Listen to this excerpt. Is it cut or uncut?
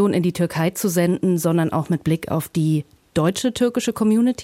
uncut